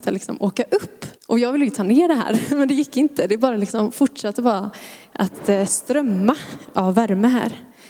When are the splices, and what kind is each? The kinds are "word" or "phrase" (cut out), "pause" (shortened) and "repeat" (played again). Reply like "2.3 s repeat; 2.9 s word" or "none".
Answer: 1.2 s pause

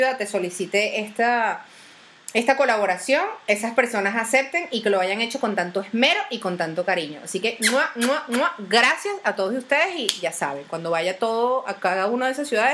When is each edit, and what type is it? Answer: none

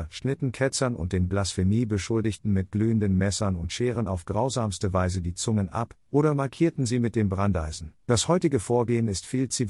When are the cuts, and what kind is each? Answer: 8.0 s pause

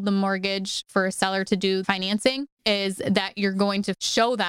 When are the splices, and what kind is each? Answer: 1.8 s phrase

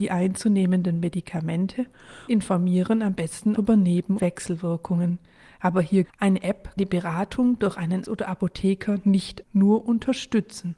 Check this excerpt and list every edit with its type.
2.3 s word; 3.5 s word; 4.2 s word; 6.0 s word; 6.8 s word; 8.0 s word; 9.4 s word

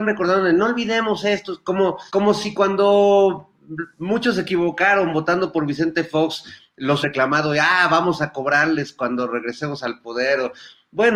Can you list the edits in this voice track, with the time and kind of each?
2.1 s pause; 7.0 s phrase

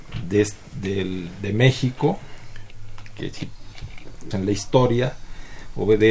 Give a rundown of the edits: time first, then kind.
4.3 s word

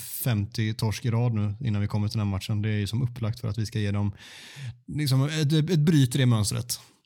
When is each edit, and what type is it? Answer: none

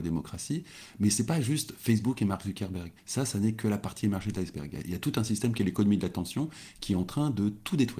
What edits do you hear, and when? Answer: 3.0 s pause

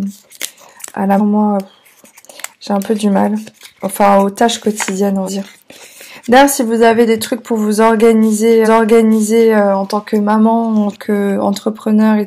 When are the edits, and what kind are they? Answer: 1.2 s word; 5.3 s word; 8.6 s repeat; 10.9 s word

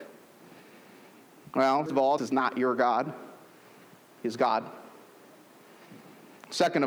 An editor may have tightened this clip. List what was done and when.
1.9 s word; 2.2 s word

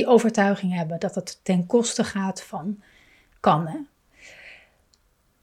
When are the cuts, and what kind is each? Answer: none

